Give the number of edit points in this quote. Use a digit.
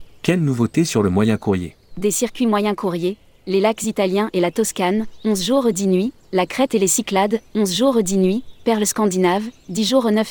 1